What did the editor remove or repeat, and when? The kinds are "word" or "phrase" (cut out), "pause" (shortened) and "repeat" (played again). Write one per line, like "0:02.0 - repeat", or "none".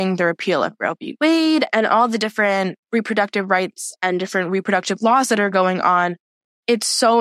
0:02.8 - pause